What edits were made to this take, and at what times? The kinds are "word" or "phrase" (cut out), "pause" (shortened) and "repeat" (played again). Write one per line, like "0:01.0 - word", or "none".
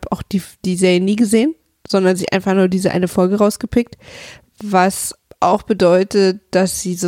none